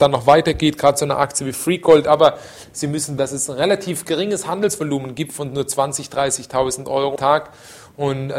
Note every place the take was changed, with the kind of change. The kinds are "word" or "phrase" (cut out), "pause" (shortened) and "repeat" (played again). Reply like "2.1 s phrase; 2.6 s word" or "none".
3.2 s word; 7.2 s word